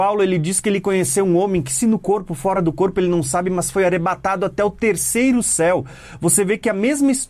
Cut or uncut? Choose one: uncut